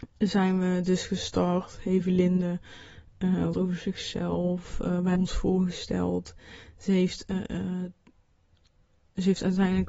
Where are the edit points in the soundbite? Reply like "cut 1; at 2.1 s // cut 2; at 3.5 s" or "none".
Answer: cut 1; at 3.5 s // cut 2; at 5.1 s

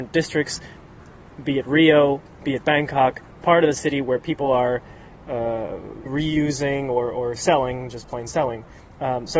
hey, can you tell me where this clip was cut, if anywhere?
cut 1; at 3.3 s // cut 2; at 6.1 s

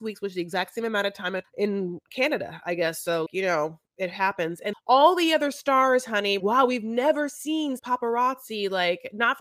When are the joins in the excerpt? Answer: cut 1; at 1.4 s // cut 2; at 3.3 s // cut 3; at 4.7 s // cut 4; at 6.4 s // cut 5; at 7.8 s

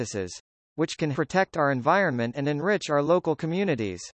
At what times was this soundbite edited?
cut 1; at 1.1 s

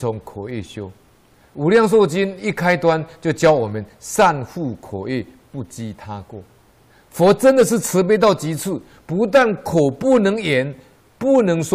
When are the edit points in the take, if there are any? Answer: cut 1; at 1.2 s // cut 2; at 6.7 s

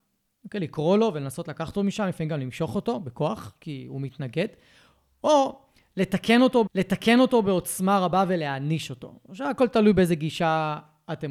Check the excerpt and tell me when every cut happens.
cut 1; at 6.7 s

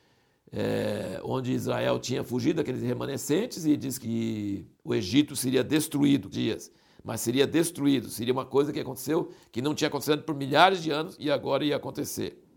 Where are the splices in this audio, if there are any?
cut 1; at 4.7 s // cut 2; at 6.3 s

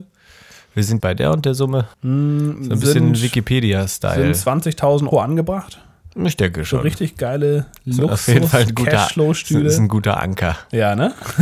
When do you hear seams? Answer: cut 1; at 1.0 s // cut 2; at 1.9 s // cut 3; at 5.1 s

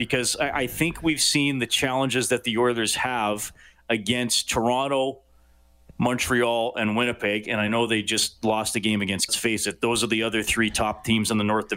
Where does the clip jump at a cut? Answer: cut 1; at 9.3 s

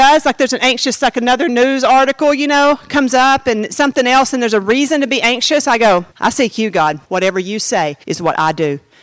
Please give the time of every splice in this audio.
cut 1; at 6.1 s // cut 2; at 7.0 s // cut 3; at 8.0 s

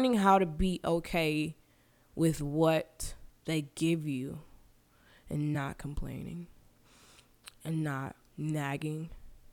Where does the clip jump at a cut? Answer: none

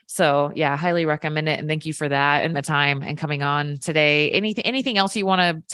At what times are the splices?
cut 1; at 2.5 s

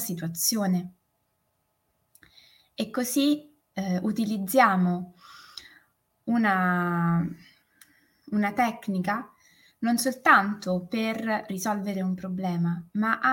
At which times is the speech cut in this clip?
none

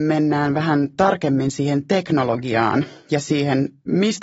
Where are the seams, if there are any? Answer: none

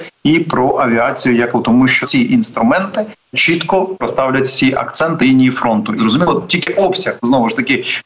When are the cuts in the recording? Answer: cut 1; at 1.5 s // cut 2; at 2.0 s // cut 3; at 3.3 s // cut 4; at 4.0 s // cut 5; at 5.2 s // cut 6; at 6.0 s

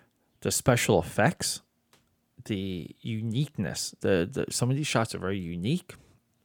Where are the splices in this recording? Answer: none

